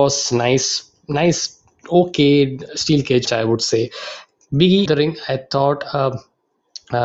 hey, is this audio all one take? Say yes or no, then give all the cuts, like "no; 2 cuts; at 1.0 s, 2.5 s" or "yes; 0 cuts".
no; 3 cuts; at 2.7 s, 3.3 s, 4.9 s